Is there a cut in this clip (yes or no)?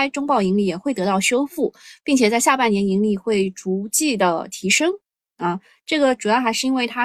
no